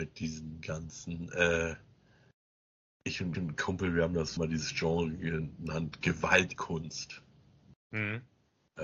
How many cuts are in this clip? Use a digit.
3